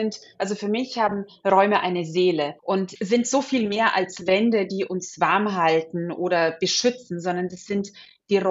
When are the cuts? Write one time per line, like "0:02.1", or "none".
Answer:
0:02.6